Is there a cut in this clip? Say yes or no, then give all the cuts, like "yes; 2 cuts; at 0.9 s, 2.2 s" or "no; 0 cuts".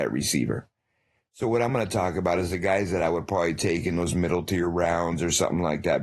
no; 0 cuts